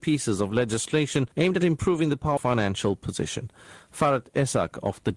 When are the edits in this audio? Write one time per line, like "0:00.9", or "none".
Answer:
0:01.3
0:02.4